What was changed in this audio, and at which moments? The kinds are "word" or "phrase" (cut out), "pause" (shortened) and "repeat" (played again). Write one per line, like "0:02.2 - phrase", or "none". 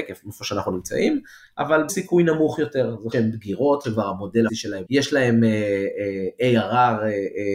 0:01.9 - word
0:03.1 - word
0:03.8 - word
0:04.5 - word
0:04.8 - word